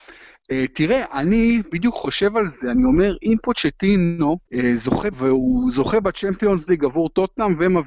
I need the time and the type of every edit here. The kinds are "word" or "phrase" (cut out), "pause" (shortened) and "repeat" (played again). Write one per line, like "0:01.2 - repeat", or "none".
0:04.5 - pause
0:05.1 - phrase